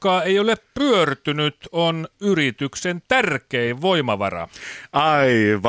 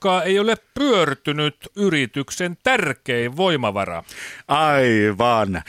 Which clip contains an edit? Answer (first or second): second